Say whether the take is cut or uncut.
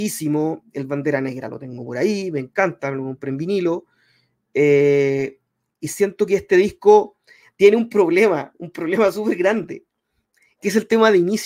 uncut